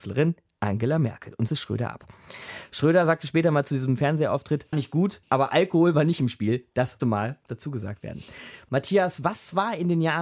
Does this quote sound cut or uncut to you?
cut